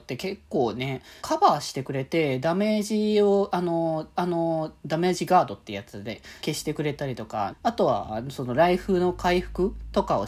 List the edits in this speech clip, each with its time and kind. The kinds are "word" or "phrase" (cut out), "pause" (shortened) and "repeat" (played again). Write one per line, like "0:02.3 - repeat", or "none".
0:01.2 - phrase
0:04.1 - repeat
0:06.4 - word
0:07.5 - word